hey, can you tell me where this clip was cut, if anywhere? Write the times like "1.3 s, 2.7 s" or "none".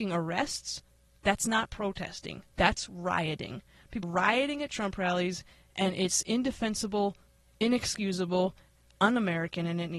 4.0 s